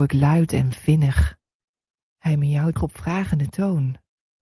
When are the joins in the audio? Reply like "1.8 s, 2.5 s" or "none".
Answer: 2.8 s